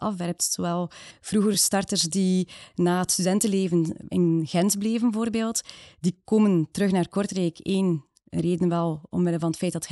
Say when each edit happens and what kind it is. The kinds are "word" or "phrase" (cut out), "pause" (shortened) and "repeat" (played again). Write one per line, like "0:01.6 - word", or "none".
none